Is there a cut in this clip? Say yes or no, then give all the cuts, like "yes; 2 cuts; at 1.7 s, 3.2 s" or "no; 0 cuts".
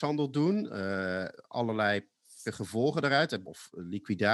yes; 2 cuts; at 2.4 s, 3.4 s